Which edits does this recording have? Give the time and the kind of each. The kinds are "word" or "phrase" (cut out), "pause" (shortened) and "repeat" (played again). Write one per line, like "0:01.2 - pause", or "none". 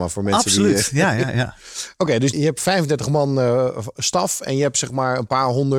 none